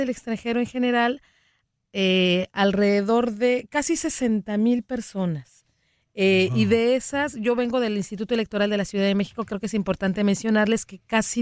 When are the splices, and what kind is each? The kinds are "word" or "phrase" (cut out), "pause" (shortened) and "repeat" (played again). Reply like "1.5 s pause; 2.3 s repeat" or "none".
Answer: none

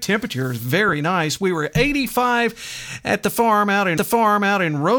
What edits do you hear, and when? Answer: 4.0 s repeat

